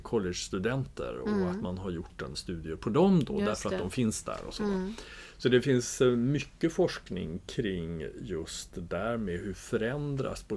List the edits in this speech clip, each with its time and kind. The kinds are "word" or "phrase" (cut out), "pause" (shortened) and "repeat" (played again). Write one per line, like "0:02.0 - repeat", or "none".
0:02.3 - word